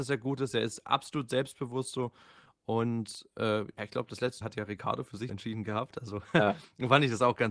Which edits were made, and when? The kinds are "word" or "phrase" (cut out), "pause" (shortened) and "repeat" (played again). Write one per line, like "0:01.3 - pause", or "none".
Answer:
0:04.4 - word
0:05.3 - word